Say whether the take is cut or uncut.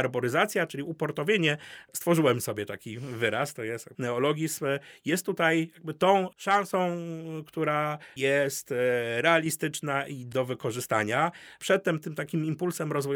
uncut